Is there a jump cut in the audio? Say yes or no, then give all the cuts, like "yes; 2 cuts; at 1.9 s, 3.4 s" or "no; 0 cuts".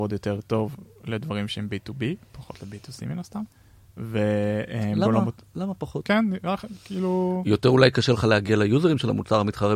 no; 0 cuts